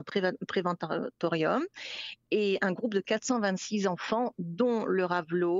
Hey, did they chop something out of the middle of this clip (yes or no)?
no